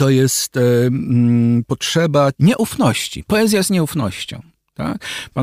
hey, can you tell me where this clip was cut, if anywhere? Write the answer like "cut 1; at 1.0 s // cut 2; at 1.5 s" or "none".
cut 1; at 1.6 s // cut 2; at 2.3 s

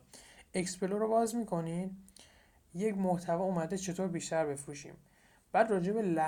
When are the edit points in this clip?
none

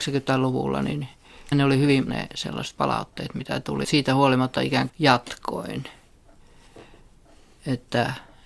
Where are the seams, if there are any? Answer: cut 1; at 1.5 s // cut 2; at 2.1 s // cut 3; at 2.8 s // cut 4; at 3.8 s // cut 5; at 4.9 s

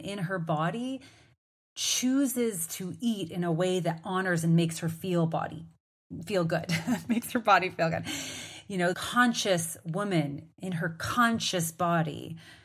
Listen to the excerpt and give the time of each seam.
cut 1; at 8.9 s

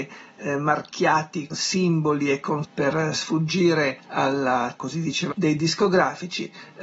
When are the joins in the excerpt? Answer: cut 1; at 1.5 s // cut 2; at 2.6 s // cut 3; at 4.0 s // cut 4; at 4.8 s // cut 5; at 5.3 s

